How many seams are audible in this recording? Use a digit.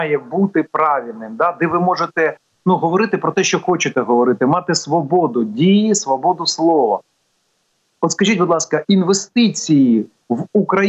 0